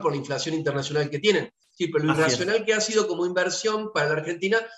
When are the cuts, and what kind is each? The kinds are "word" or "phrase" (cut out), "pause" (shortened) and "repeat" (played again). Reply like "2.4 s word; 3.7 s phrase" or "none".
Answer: none